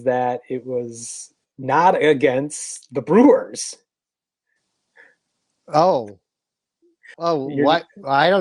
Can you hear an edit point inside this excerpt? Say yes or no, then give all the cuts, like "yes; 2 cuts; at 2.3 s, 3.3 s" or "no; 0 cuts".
yes; 1 cut; at 7.1 s